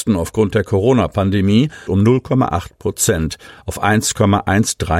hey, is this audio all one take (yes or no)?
no